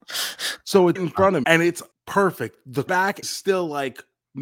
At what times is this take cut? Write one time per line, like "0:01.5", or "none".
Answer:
0:01.0
0:01.4
0:01.9
0:02.9
0:03.2